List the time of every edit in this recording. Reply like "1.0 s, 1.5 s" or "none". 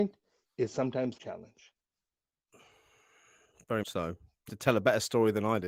1.2 s, 3.8 s, 4.5 s